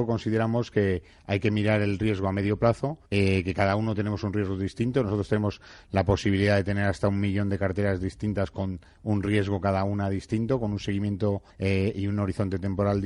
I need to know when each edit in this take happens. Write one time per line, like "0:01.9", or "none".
0:03.1
0:11.5